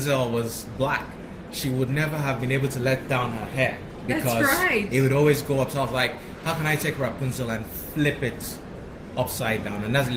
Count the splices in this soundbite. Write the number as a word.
zero